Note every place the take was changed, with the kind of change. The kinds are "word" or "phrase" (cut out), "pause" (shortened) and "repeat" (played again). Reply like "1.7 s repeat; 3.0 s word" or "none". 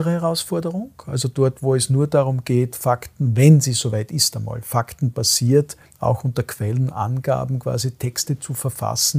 none